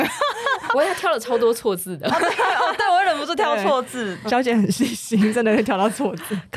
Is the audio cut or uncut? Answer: cut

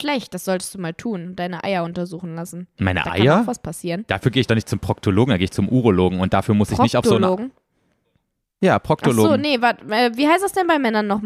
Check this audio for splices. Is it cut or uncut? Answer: uncut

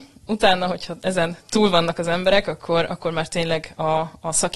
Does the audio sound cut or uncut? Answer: uncut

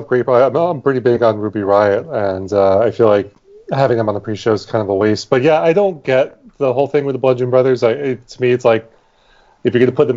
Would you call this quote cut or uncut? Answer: uncut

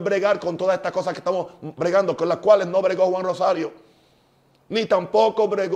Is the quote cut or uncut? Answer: uncut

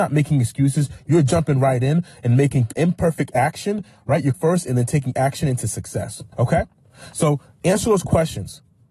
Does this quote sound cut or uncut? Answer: cut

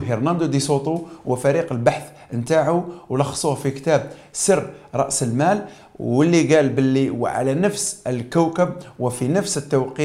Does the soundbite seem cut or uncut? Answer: uncut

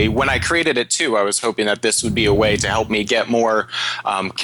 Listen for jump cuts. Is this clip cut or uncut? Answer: uncut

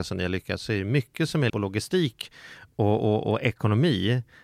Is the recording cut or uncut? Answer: cut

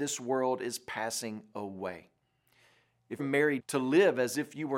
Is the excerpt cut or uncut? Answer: cut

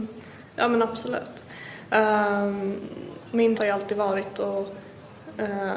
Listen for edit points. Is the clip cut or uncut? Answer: cut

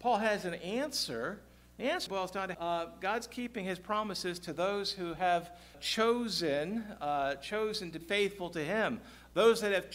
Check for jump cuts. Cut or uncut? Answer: cut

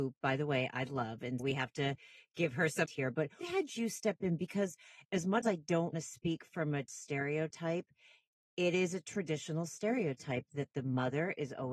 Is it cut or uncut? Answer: cut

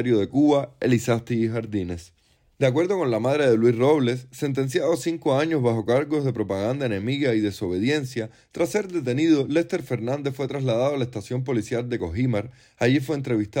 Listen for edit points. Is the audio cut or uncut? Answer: uncut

